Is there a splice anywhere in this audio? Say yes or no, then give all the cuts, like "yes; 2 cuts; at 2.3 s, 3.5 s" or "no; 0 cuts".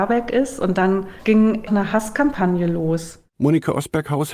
yes; 1 cut; at 1.7 s